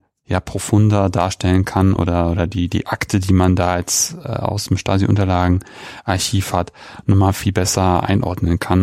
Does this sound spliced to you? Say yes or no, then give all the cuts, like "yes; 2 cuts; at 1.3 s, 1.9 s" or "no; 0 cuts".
no; 0 cuts